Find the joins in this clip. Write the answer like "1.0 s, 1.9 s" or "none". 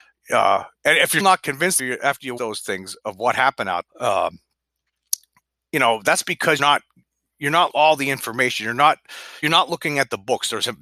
1.2 s, 1.8 s, 2.4 s, 3.9 s, 6.6 s, 7.7 s, 9.4 s

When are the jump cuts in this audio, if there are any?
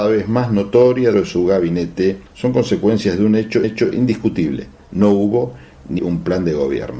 1.1 s, 2.3 s, 3.6 s, 6.0 s

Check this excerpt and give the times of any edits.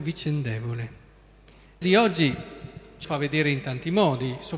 1.8 s, 3.0 s

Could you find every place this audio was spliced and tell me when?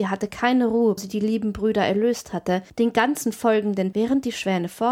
1.0 s, 2.7 s, 3.9 s

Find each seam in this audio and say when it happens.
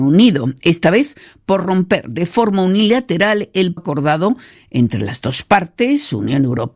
3.8 s

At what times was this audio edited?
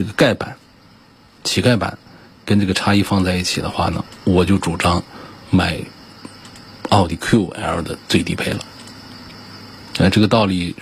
5.4 s

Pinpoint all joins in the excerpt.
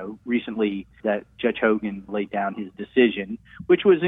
1.0 s, 2.1 s

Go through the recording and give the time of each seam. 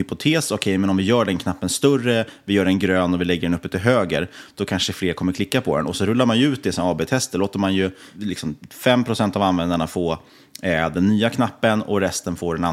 none

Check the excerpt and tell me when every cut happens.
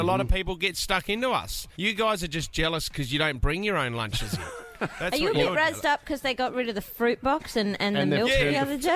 1.7 s

